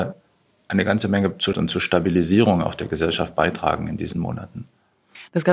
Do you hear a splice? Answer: yes; 2 cuts; at 1.5 s, 4.1 s

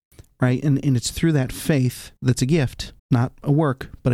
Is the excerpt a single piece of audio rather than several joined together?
no; 2 cuts; at 2.2 s, 3.0 s

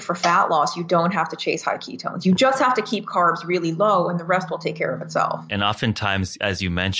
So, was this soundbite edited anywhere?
no; 0 cuts

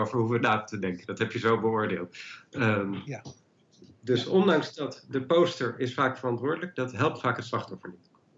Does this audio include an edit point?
no; 0 cuts

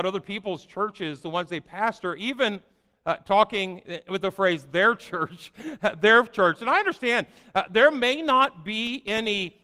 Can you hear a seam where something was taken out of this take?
no; 0 cuts

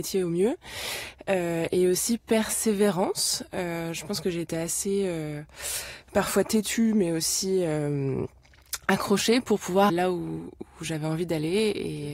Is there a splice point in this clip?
yes; 1 cut; at 9.9 s

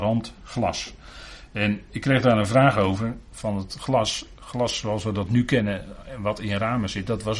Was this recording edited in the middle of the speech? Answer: no; 0 cuts

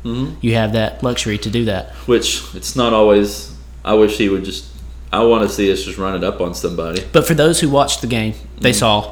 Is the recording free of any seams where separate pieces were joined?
yes; 0 cuts

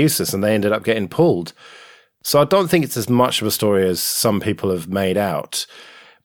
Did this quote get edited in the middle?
no; 0 cuts

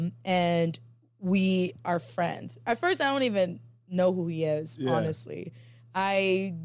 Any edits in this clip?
no; 0 cuts

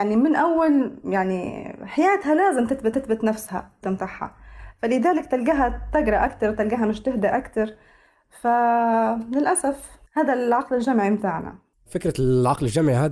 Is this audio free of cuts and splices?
no; 5 cuts; at 2.9 s, 3.8 s, 6.3 s, 10.1 s, 11.7 s

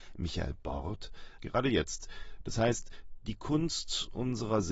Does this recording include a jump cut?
yes; 1 cut; at 1.4 s

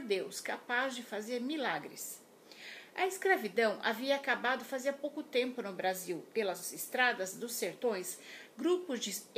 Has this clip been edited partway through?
yes; 1 cut; at 6.3 s

